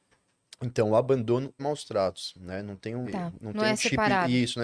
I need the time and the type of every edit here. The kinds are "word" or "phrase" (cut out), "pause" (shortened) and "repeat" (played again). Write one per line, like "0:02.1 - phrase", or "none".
0:01.6 - word
0:03.0 - word